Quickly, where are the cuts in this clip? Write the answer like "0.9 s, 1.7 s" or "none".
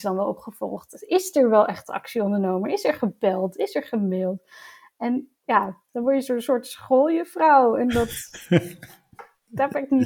none